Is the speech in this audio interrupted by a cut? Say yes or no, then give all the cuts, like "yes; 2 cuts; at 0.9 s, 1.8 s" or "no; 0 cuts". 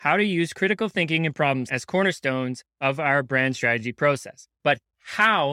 yes; 2 cuts; at 1.7 s, 4.5 s